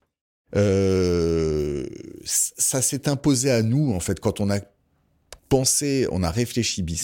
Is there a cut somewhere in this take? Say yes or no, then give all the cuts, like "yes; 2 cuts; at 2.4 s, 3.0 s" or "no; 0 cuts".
yes; 1 cut; at 5.4 s